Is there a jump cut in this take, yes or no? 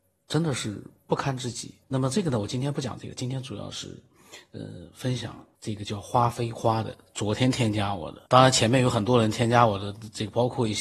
yes